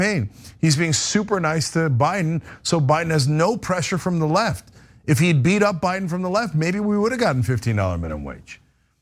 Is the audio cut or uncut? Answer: uncut